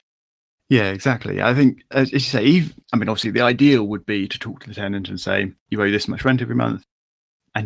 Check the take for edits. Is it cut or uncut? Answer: cut